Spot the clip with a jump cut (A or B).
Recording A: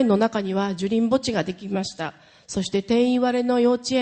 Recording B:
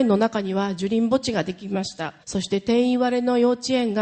B